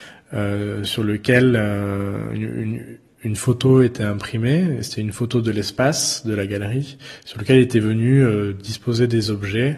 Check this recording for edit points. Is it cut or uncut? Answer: uncut